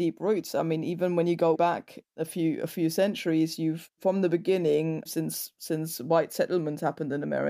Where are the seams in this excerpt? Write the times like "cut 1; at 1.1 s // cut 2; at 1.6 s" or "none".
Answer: cut 1; at 1.5 s // cut 2; at 2.1 s // cut 3; at 5.1 s